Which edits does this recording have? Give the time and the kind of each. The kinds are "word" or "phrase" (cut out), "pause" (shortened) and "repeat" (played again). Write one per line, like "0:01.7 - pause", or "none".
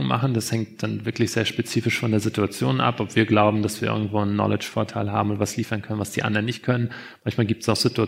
none